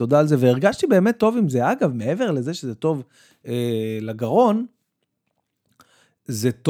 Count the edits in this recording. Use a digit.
0